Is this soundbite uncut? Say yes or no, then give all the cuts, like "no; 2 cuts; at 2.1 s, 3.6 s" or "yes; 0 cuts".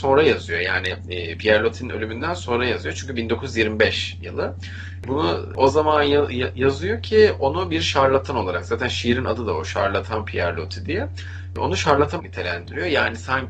no; 2 cuts; at 4.2 s, 12.2 s